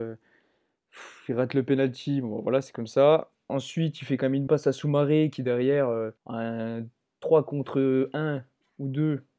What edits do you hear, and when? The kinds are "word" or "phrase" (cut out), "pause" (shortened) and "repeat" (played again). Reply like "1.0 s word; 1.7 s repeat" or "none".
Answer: 4.5 s word; 6.2 s pause